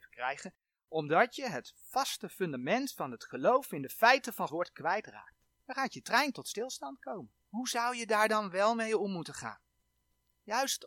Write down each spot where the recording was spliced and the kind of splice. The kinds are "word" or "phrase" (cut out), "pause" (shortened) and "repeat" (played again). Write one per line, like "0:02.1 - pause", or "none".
0:04.5 - word
0:05.5 - pause
0:07.4 - pause